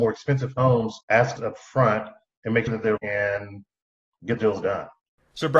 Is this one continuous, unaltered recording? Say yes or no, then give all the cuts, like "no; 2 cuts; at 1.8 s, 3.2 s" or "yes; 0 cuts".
no; 5 cuts; at 1.0 s, 1.4 s, 2.7 s, 3.0 s, 4.4 s